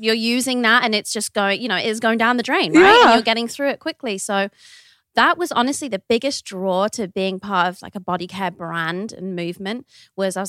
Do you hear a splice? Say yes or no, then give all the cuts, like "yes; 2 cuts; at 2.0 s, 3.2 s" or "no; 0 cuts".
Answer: no; 0 cuts